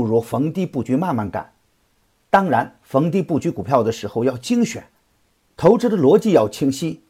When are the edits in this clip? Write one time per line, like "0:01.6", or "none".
none